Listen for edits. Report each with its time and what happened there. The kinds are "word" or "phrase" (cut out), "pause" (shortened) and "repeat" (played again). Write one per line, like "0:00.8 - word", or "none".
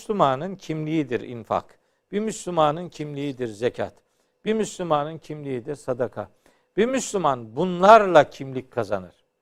none